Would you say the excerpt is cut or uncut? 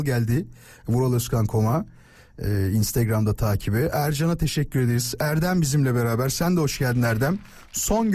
uncut